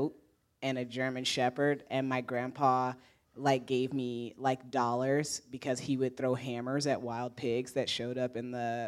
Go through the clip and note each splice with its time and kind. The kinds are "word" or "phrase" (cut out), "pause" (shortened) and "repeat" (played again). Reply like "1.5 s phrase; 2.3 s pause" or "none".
none